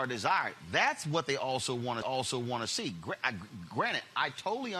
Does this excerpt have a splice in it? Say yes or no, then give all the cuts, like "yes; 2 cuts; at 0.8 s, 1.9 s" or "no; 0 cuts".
yes; 1 cut; at 2.0 s